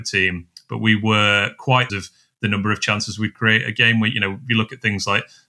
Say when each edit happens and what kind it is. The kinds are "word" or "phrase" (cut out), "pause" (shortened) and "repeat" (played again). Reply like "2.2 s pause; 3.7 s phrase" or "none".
1.9 s phrase